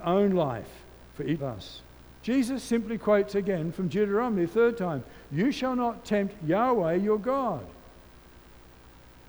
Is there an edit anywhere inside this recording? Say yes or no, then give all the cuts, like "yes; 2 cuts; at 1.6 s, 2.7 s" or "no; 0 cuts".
yes; 3 cuts; at 1.1 s, 1.4 s, 2.2 s